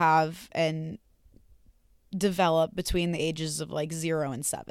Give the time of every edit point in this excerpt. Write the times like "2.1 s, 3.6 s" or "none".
none